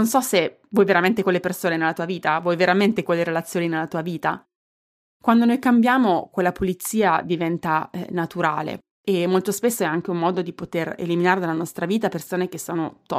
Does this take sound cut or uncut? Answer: uncut